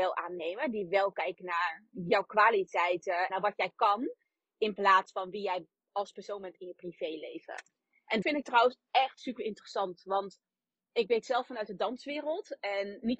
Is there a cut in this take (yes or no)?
yes